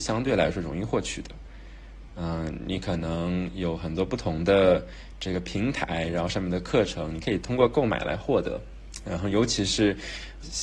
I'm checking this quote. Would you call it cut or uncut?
uncut